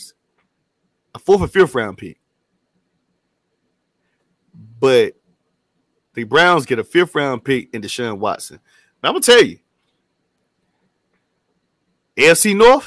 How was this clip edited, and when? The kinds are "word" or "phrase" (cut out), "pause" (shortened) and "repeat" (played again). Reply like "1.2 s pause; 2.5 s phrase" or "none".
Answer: none

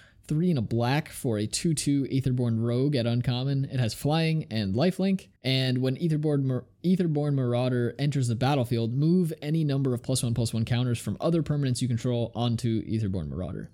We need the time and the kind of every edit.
5.4 s pause

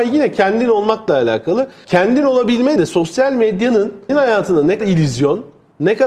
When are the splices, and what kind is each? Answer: 1.8 s word; 2.8 s word; 4.1 s word; 4.8 s word

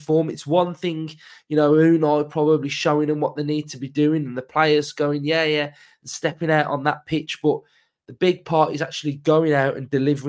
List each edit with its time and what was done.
none

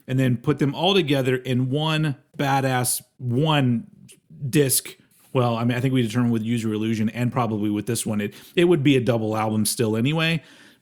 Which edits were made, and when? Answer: none

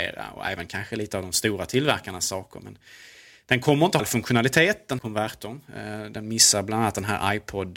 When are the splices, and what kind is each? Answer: 4.0 s word; 5.0 s word

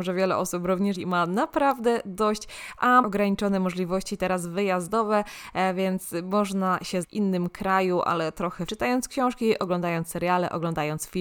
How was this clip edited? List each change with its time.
0.9 s phrase; 3.0 s word; 7.0 s word; 8.7 s phrase

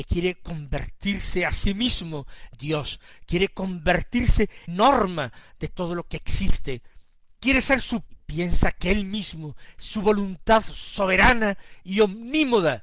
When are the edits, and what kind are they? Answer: 2.5 s word; 4.7 s word; 8.1 s phrase

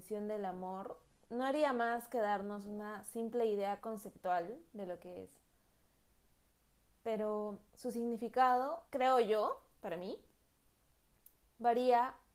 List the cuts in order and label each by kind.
1.1 s pause; 7.7 s pause; 8.9 s pause

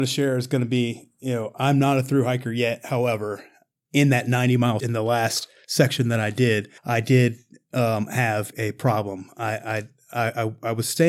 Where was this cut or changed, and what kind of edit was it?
3.9 s word; 4.8 s word; 6.8 s pause; 8.5 s word

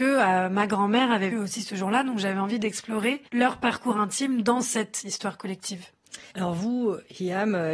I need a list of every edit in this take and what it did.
1.3 s word; 3.3 s pause; 6.3 s pause

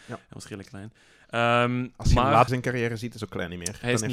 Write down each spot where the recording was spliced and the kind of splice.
2.5 s word; 3.2 s word

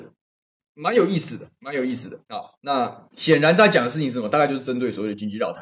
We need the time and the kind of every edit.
2.2 s pause; 3.1 s pause

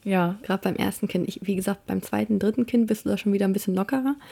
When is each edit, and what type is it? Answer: none

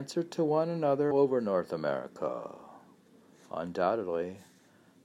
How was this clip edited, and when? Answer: 1.1 s word

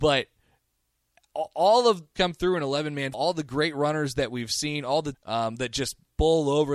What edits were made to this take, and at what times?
2.1 s phrase; 3.1 s word; 5.1 s phrase

